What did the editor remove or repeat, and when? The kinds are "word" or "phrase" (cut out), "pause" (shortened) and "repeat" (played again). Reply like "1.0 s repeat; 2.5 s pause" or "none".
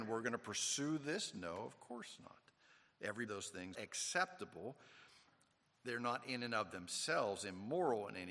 3.3 s phrase; 3.7 s word

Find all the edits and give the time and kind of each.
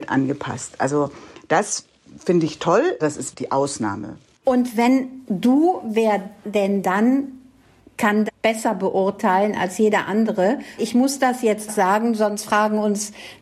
3.0 s word; 3.3 s word; 5.3 s word; 8.3 s word; 10.8 s word; 11.7 s word

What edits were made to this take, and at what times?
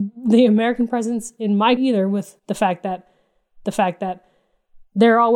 1.8 s word; 2.4 s pause; 3.6 s repeat

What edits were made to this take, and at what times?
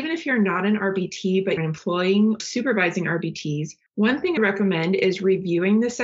1.6 s word; 2.4 s word; 3.9 s pause; 4.4 s word

